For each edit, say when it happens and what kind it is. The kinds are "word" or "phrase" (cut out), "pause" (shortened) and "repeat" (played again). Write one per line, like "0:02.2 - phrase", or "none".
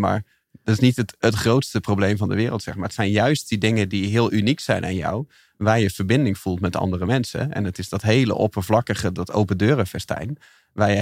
none